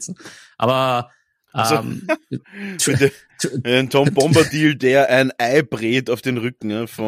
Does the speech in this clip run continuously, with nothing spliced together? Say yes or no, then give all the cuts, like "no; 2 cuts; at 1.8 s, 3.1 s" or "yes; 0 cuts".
yes; 0 cuts